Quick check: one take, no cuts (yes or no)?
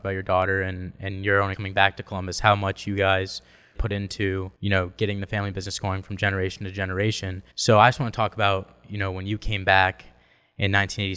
no